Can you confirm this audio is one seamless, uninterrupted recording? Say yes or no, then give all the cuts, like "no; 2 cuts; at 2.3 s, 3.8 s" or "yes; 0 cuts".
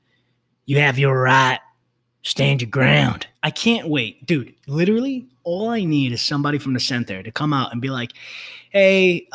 no; 2 cuts; at 2.0 s, 3.3 s